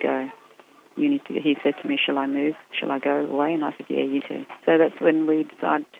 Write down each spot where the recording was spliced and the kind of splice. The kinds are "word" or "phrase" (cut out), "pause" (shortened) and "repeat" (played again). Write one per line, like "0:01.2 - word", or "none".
0:04.2 - word
0:04.6 - pause